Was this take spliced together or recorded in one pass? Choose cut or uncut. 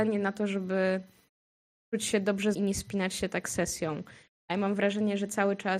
cut